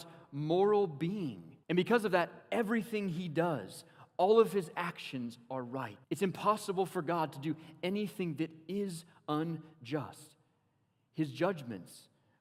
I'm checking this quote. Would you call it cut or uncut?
cut